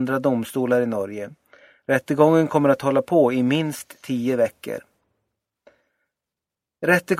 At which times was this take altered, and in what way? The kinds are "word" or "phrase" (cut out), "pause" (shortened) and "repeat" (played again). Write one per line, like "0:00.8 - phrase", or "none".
none